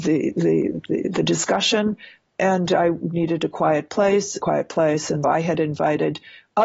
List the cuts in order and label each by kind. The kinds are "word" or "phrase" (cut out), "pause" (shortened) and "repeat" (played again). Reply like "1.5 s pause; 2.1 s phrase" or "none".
4.4 s phrase; 5.2 s word